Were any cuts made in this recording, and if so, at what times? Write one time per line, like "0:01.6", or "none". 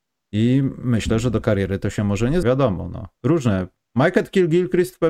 0:01.4
0:02.4